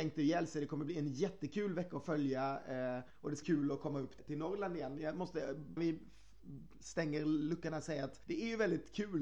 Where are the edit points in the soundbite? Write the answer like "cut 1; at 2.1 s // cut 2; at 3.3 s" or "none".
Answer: cut 1; at 3.1 s // cut 2; at 3.4 s // cut 3; at 4.2 s // cut 4; at 5.8 s // cut 5; at 8.2 s